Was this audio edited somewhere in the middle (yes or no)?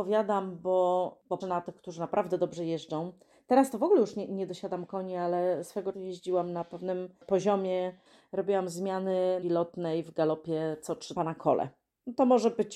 yes